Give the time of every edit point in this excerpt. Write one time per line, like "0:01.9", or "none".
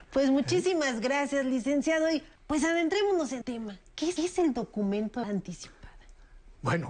0:02.4
0:03.4
0:04.2
0:05.2